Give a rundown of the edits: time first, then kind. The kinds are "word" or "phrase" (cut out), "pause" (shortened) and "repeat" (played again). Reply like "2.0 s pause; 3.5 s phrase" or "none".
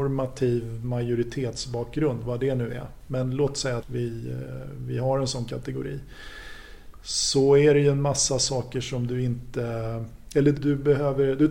3.8 s word; 10.5 s word